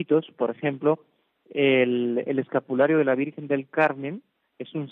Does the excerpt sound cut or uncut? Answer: uncut